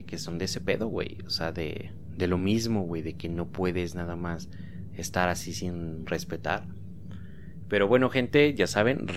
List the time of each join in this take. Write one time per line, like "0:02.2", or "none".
none